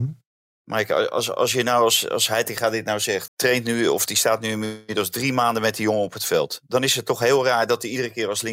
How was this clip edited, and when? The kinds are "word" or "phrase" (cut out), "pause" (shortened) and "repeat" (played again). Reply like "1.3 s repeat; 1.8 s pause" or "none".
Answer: 3.3 s phrase